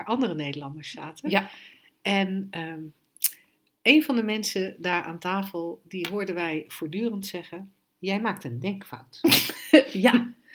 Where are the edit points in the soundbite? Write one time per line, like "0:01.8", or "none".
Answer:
none